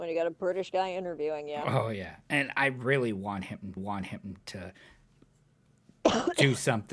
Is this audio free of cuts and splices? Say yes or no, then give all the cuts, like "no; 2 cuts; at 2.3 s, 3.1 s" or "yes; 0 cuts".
no; 1 cut; at 3.8 s